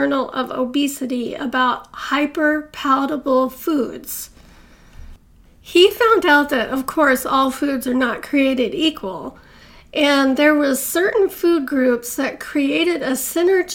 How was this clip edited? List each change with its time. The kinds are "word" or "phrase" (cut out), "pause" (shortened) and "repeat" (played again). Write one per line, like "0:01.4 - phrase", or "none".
none